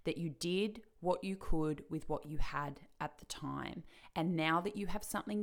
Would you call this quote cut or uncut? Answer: uncut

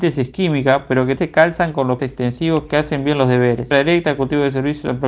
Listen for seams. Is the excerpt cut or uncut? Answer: cut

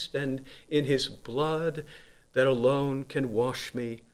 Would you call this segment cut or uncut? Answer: uncut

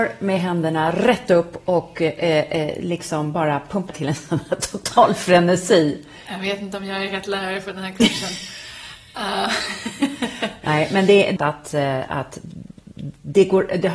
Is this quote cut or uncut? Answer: cut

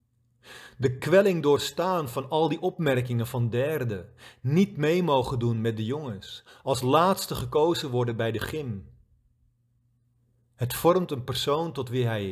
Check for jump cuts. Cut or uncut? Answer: uncut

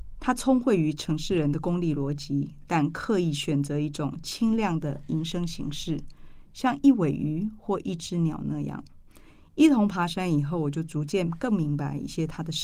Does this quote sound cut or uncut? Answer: uncut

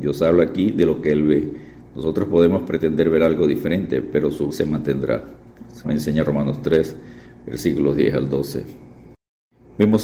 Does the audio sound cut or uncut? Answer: cut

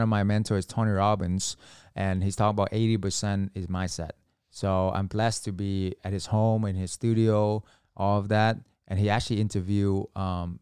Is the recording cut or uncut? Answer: uncut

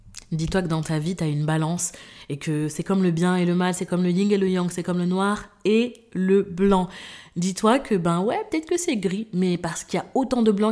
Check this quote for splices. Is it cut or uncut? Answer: uncut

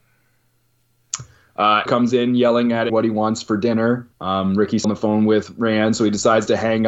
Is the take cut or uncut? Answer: cut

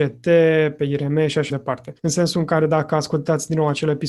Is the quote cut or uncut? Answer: cut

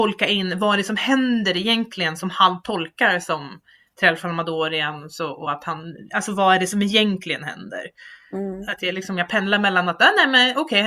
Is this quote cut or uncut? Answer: uncut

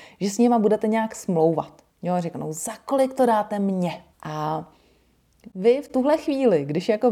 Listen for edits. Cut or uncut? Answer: cut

